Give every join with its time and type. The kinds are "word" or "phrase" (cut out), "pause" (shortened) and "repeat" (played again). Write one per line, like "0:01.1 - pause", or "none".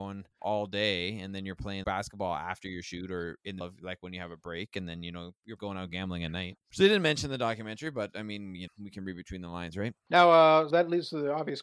0:01.8 - word
0:03.6 - word
0:05.6 - word
0:08.7 - word
0:10.7 - word